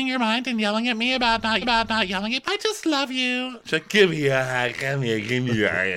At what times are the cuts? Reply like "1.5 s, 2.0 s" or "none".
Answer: 1.6 s, 2.4 s